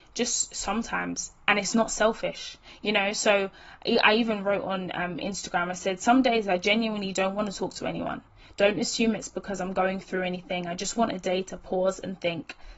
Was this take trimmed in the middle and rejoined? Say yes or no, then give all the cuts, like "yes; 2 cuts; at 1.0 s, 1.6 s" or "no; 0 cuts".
no; 0 cuts